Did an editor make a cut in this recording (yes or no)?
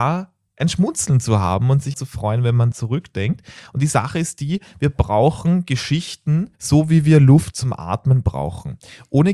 yes